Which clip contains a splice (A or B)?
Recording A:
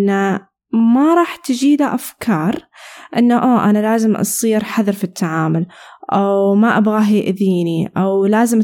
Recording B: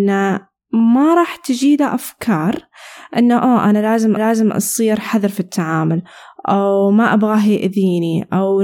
B